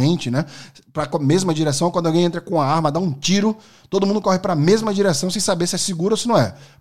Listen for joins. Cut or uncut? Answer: uncut